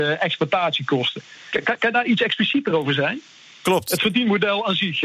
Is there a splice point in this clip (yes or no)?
no